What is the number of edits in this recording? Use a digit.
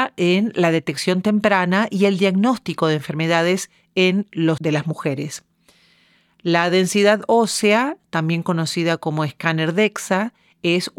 1